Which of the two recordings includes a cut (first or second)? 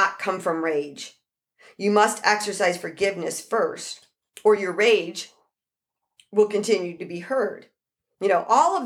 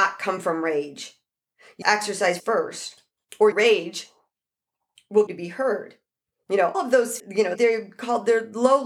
second